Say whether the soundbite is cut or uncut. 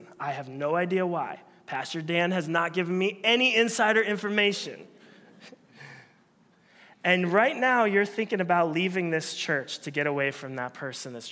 uncut